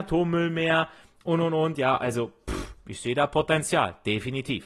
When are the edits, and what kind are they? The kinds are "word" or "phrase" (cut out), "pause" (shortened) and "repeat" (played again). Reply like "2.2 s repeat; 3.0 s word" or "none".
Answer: none